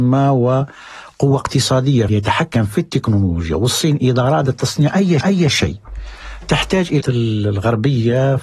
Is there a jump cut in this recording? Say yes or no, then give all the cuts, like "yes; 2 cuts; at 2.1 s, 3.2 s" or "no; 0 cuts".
yes; 3 cuts; at 2.1 s, 5.2 s, 7.0 s